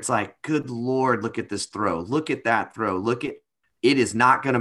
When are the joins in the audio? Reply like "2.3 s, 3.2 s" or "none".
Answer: 3.6 s